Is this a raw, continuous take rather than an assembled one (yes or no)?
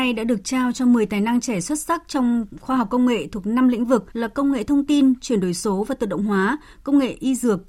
no